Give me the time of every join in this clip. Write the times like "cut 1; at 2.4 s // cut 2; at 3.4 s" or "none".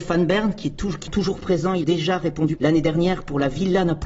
cut 1; at 1.1 s // cut 2; at 1.8 s // cut 3; at 2.6 s